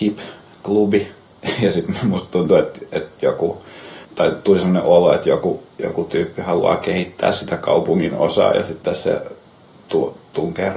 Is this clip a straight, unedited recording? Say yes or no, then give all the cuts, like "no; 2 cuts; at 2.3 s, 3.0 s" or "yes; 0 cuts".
no; 1 cut; at 4.0 s